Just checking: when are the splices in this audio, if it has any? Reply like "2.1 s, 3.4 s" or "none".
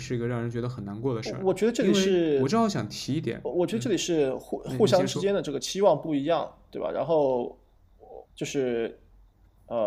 8.3 s